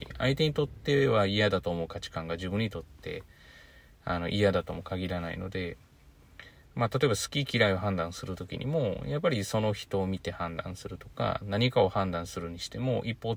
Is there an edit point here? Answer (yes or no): no